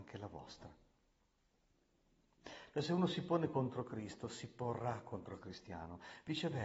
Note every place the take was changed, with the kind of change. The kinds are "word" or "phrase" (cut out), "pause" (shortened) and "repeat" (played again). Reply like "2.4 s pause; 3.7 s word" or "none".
none